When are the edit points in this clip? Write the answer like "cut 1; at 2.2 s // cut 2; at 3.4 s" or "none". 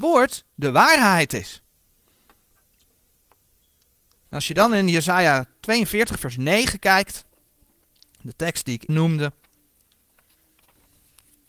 cut 1; at 8.9 s

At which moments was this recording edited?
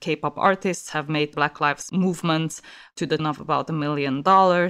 cut 1; at 1.3 s // cut 2; at 1.9 s // cut 3; at 3.2 s

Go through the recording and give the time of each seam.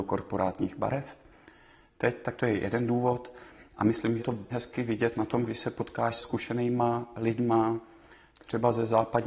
cut 1; at 4.2 s // cut 2; at 4.5 s // cut 3; at 6.2 s

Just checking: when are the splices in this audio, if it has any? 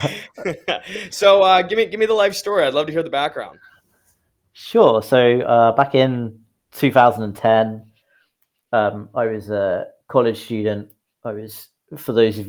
none

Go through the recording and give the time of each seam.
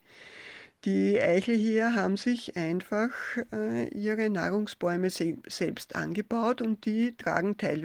none

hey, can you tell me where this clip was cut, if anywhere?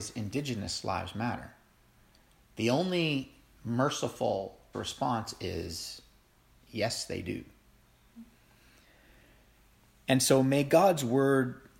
cut 1; at 4.7 s

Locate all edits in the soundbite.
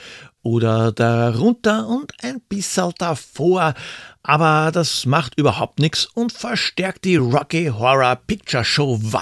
none

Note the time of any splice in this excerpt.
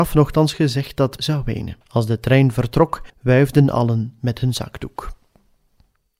cut 1; at 1.2 s // cut 2; at 1.8 s // cut 3; at 3.1 s

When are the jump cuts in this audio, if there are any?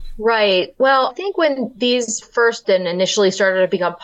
cut 1; at 1.1 s // cut 2; at 2.2 s // cut 3; at 2.6 s

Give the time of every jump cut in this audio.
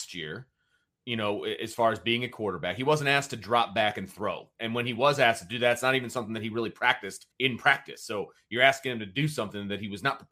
cut 1; at 7.3 s

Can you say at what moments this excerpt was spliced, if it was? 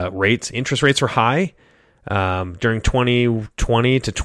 none

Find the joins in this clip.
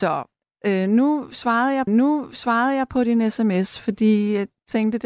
cut 1; at 1.9 s

